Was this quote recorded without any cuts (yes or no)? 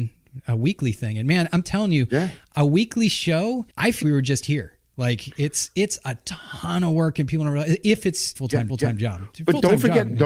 no